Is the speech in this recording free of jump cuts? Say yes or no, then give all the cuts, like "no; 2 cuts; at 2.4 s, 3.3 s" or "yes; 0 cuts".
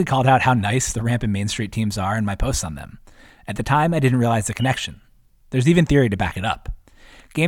yes; 0 cuts